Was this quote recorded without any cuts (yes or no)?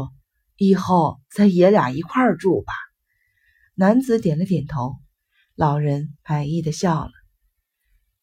yes